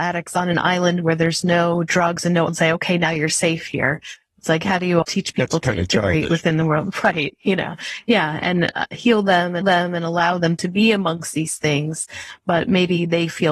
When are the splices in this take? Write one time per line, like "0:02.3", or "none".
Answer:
0:02.5
0:05.0
0:09.6